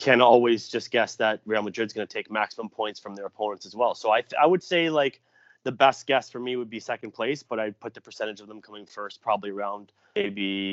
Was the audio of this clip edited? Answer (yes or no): no